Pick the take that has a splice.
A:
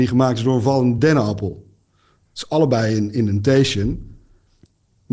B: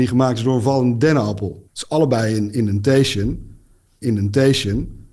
B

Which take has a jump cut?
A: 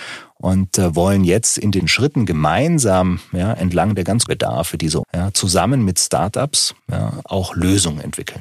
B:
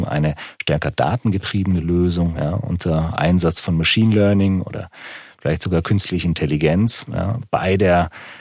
A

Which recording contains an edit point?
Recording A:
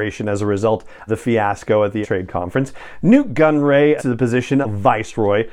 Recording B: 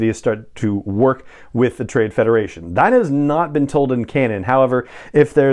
A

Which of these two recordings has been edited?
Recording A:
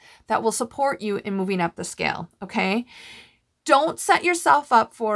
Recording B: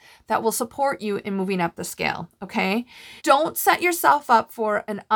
B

